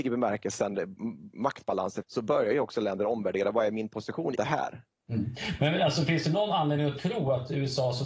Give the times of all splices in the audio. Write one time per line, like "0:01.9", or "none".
0:02.0
0:04.4

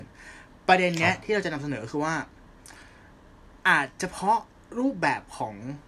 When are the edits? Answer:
0:03.6

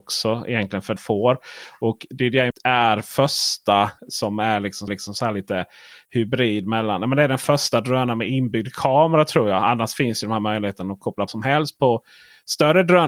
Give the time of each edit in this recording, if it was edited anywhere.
0:01.0
0:02.5
0:04.0
0:04.9
0:11.3

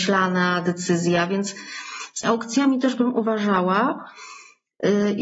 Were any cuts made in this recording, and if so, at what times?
0:02.2

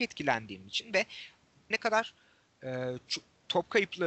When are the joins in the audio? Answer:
0:01.7

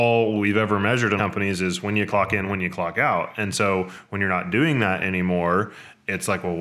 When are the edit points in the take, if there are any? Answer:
0:01.2

